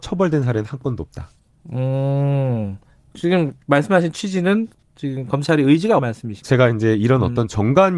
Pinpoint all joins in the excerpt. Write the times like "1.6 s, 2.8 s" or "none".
3.1 s, 3.6 s, 4.8 s, 6.0 s, 6.4 s